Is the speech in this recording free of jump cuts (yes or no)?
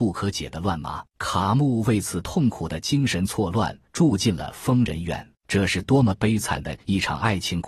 no